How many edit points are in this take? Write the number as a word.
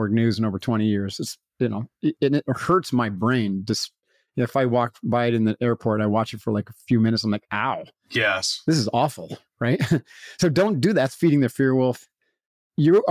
zero